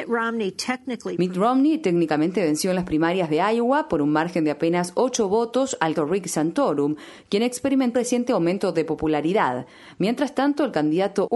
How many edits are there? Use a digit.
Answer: 2